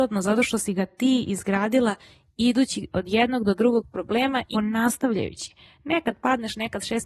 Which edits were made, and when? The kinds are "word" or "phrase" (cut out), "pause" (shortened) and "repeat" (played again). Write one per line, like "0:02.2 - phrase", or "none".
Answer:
0:04.5 - phrase